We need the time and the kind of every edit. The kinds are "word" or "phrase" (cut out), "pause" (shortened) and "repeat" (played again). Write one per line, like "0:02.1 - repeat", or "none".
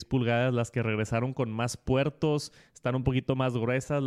none